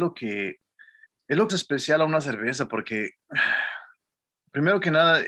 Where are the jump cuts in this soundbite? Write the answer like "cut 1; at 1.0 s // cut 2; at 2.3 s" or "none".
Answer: cut 1; at 1.1 s // cut 2; at 1.5 s

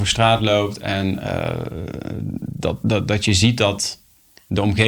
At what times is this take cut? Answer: none

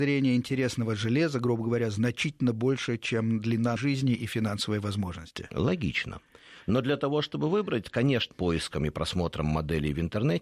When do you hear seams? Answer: cut 1; at 3.8 s // cut 2; at 8.3 s

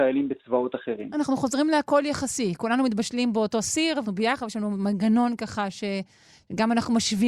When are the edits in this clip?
cut 1; at 4.0 s

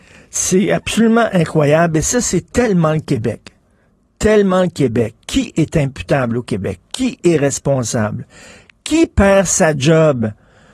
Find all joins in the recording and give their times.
none

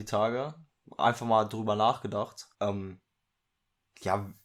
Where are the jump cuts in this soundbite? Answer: cut 1; at 2.5 s

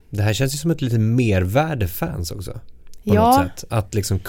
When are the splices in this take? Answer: cut 1; at 1.9 s

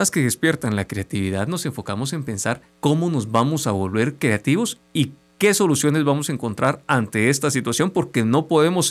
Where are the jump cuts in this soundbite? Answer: cut 1; at 2.7 s

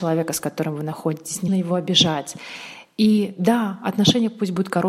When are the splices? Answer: cut 1; at 1.5 s

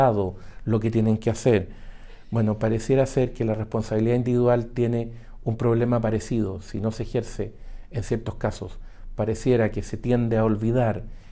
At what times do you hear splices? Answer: none

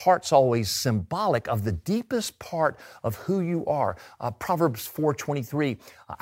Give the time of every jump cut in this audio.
none

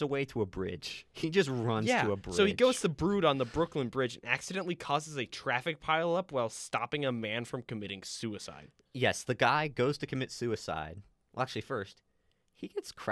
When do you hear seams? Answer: none

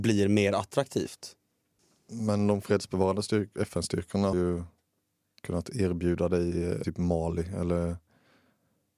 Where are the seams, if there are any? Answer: cut 1; at 4.3 s // cut 2; at 6.8 s

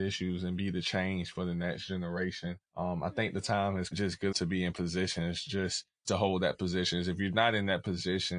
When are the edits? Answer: cut 1; at 2.7 s // cut 2; at 3.9 s // cut 3; at 4.3 s // cut 4; at 6.0 s

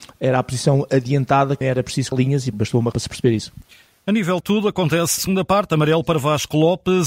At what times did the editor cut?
cut 1; at 1.6 s // cut 2; at 2.1 s // cut 3; at 2.5 s // cut 4; at 2.9 s // cut 5; at 4.4 s // cut 6; at 5.2 s

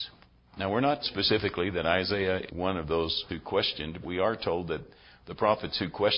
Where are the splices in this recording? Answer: cut 1; at 1.0 s // cut 2; at 2.5 s // cut 3; at 3.3 s // cut 4; at 4.0 s

